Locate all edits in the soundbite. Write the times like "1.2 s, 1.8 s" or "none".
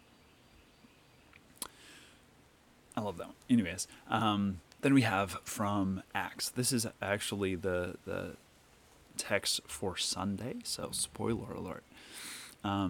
none

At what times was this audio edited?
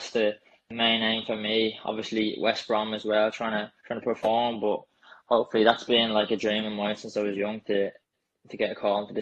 3.8 s

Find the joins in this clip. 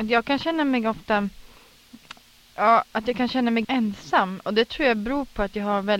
3.6 s

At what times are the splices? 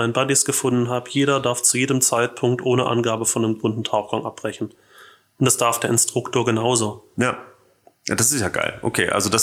none

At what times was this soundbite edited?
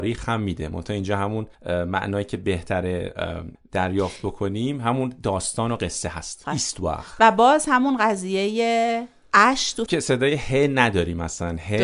1.5 s, 3.5 s, 6.4 s, 9.9 s

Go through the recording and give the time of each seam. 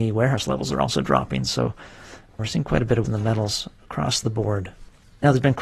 2.4 s, 3.1 s

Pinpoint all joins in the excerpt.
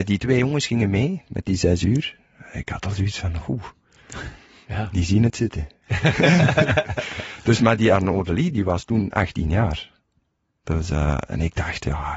none

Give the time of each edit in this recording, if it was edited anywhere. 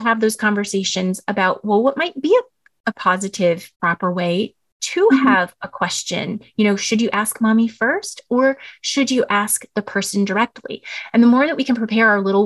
3.7 s

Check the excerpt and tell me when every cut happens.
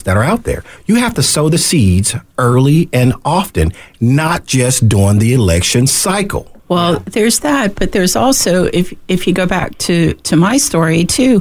6.6 s

